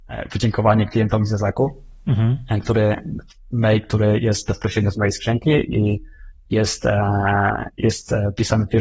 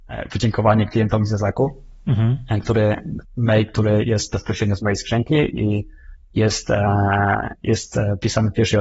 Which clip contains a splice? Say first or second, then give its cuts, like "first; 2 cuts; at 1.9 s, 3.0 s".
second; 1 cut; at 3.2 s